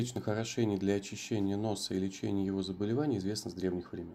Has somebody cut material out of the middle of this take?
no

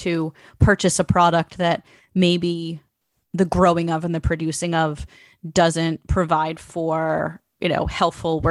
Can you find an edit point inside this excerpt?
no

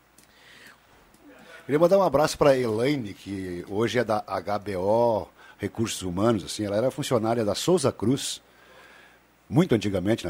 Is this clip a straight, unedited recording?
yes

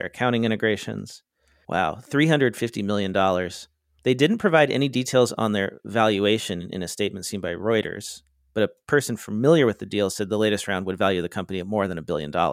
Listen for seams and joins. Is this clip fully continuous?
yes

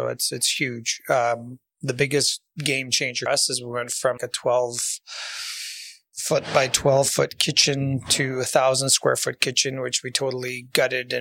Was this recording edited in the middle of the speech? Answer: yes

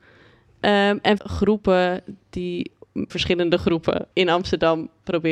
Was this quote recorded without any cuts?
no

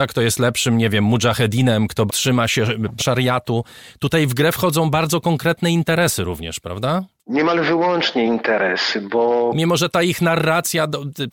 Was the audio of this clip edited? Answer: yes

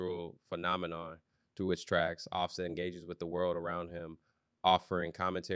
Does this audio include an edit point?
no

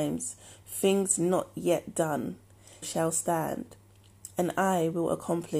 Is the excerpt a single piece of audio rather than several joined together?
no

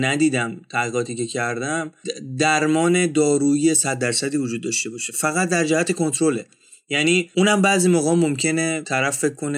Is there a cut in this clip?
no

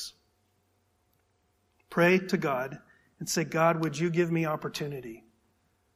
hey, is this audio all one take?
yes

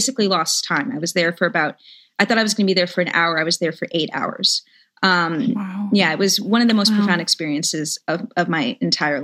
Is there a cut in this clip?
no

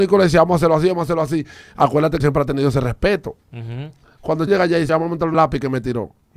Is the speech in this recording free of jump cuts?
no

